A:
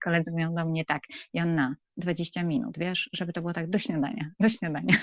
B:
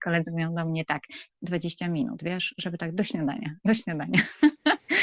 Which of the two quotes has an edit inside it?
B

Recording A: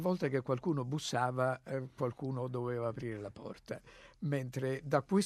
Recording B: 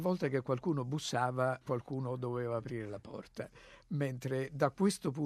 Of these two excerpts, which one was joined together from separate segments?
B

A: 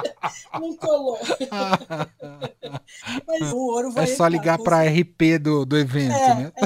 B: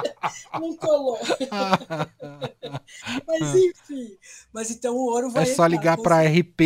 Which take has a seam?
A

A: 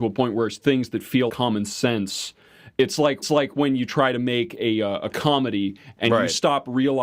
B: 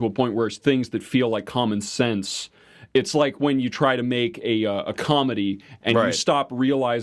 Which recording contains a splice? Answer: A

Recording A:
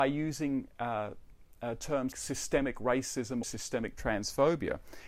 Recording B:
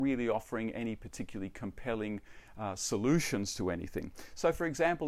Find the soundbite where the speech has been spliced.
A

